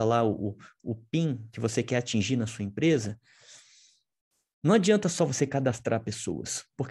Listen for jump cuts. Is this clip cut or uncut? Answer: uncut